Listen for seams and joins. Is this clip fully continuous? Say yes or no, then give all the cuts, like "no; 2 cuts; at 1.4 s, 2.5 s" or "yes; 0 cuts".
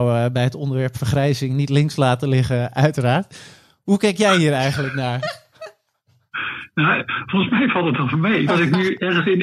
no; 1 cut; at 8.5 s